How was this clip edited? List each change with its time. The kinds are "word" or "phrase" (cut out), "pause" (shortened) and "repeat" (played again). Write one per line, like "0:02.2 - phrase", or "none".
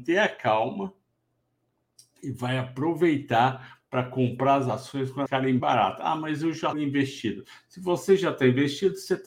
0:05.3 - word
0:05.6 - word
0:06.7 - word